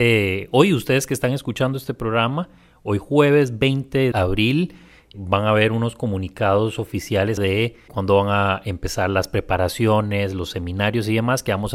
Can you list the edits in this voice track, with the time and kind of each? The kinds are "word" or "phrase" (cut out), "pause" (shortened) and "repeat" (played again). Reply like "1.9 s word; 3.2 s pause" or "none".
4.1 s word; 5.1 s word; 7.4 s word; 7.9 s word